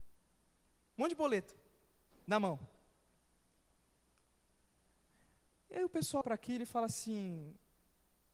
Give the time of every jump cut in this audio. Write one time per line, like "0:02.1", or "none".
0:06.2